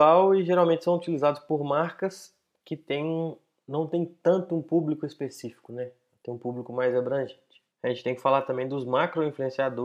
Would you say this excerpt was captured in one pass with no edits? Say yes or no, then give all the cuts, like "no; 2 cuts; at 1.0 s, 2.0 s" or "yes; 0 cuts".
no; 1 cut; at 7.7 s